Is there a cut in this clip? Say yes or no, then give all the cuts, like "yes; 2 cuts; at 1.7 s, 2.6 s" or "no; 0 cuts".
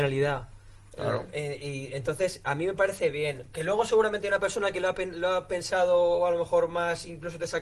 no; 0 cuts